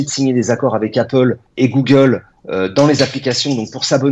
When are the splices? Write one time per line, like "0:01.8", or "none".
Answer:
0:01.5